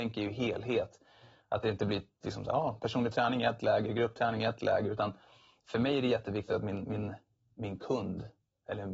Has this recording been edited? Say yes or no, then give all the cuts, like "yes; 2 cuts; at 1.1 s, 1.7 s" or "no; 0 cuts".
no; 0 cuts